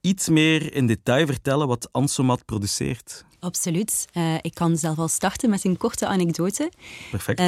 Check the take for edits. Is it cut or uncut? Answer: cut